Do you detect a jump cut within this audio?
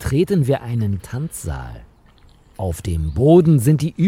yes; 1 cut; at 1.0 s

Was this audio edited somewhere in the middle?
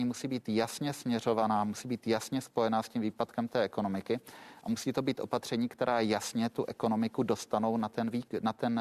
no; 0 cuts

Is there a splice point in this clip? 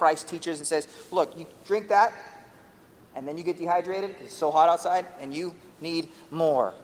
no; 0 cuts

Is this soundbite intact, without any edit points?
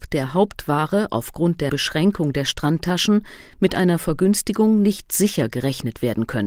no; 1 cut; at 1.7 s

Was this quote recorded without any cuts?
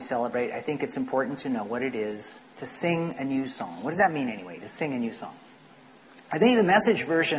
yes; 0 cuts

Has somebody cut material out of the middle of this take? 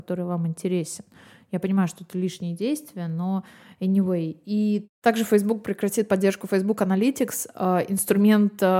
no; 0 cuts

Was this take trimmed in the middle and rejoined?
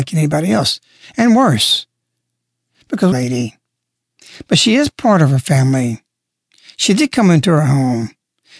yes; 1 cut; at 3.1 s

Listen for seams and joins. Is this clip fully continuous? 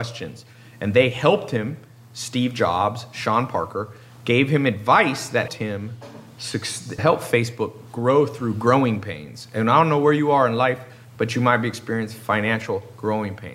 no; 2 cuts; at 5.5 s, 7.0 s

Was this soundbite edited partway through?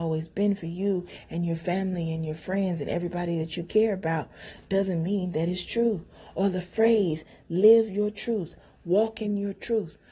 no; 0 cuts

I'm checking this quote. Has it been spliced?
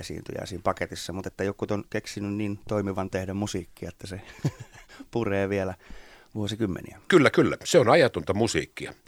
yes; 1 cut; at 3.1 s

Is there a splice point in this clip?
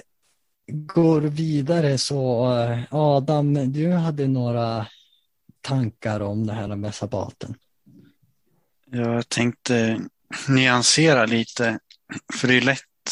no; 0 cuts

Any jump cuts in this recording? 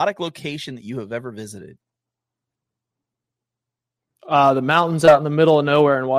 no; 0 cuts

